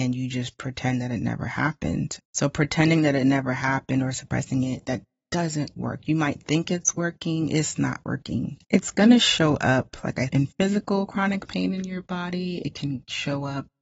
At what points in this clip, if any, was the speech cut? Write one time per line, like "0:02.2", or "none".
0:02.2
0:05.8
0:08.6
0:10.3